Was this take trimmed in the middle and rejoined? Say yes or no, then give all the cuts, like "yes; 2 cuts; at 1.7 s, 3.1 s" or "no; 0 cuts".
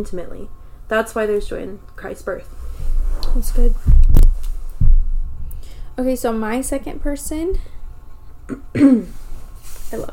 no; 0 cuts